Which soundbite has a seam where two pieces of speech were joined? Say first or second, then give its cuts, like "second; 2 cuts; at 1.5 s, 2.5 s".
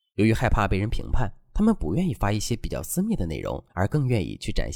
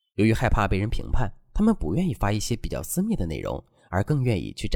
first; 1 cut; at 3.7 s